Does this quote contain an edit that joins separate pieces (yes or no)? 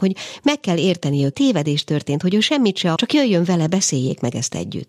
yes